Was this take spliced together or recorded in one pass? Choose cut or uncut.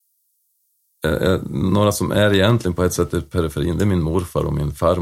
uncut